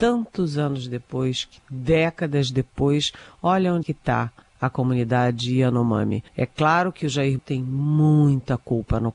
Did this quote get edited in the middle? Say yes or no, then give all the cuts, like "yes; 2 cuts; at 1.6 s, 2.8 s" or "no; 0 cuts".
yes; 4 cuts; at 3.8 s, 4.4 s, 6.3 s, 7.4 s